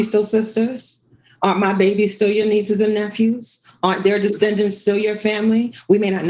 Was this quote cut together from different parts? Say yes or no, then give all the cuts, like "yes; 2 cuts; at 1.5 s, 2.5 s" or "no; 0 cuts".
no; 0 cuts